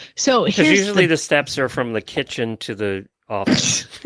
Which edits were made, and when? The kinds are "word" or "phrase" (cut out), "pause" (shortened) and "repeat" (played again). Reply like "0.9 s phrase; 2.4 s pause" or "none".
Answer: none